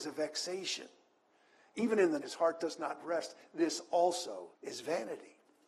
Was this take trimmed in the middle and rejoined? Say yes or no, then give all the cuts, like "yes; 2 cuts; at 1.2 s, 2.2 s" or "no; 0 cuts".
yes; 2 cuts; at 2.2 s, 4.5 s